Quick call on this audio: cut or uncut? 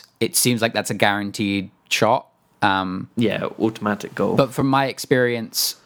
uncut